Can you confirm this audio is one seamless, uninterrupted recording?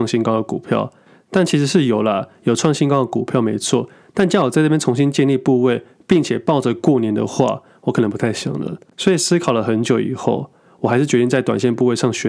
yes; 0 cuts

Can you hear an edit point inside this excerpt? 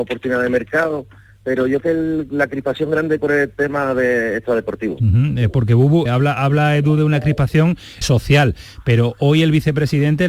yes; 4 cuts; at 1.8 s, 3.2 s, 6.1 s, 8.0 s

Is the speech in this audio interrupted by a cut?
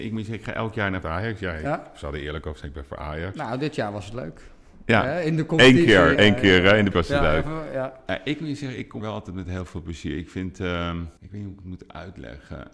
yes; 5 cuts; at 1.0 s, 6.1 s, 6.9 s, 9.0 s, 11.2 s

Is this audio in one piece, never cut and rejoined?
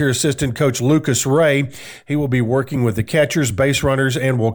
yes; 0 cuts

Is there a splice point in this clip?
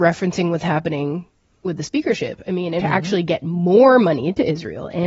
yes; 1 cut; at 2.8 s

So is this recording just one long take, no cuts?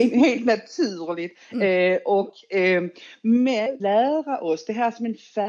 no; 1 cut; at 3.8 s

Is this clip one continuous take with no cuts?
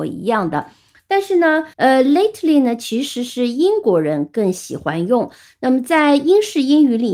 no; 1 cut; at 1.7 s

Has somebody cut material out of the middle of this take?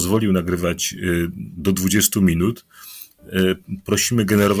no; 0 cuts

